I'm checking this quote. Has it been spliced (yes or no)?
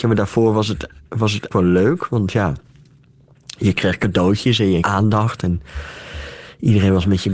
yes